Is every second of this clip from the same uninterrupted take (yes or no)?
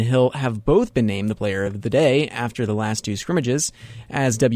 yes